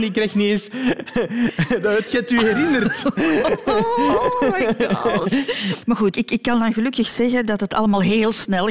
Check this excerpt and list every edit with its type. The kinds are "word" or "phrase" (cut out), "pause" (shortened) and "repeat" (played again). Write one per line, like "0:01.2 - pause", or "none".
0:02.1 - phrase
0:06.1 - word

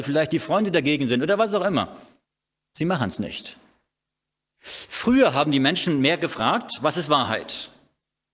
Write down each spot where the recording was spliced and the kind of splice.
none

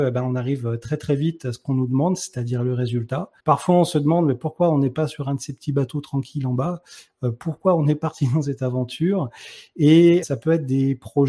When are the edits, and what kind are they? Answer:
0:03.4 - pause
0:10.2 - word

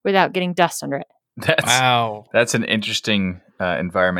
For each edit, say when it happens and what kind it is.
none

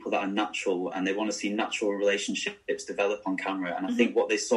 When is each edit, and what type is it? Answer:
none

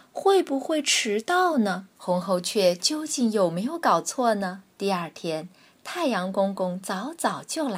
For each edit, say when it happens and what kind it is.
0:02.0 - pause
0:04.7 - pause

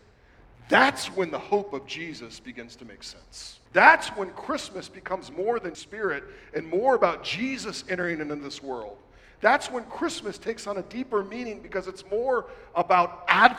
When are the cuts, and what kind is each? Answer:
0:03.7 - pause
0:05.7 - phrase

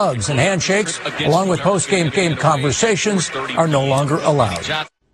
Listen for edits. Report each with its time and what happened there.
0:01.6 - word
0:02.1 - repeat

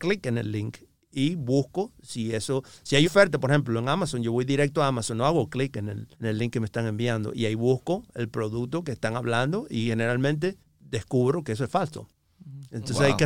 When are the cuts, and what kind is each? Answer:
0:03.0 - word
0:06.1 - pause
0:10.6 - pause

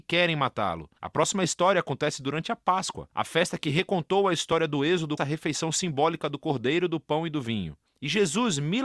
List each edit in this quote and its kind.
0:01.0 - pause
0:05.2 - phrase

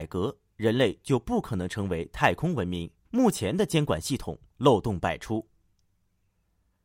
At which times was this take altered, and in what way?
0:03.1 - pause

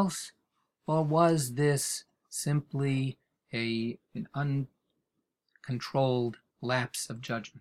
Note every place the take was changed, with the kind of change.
0:04.0 - pause
0:06.5 - pause

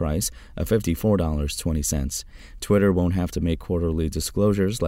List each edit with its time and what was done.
none

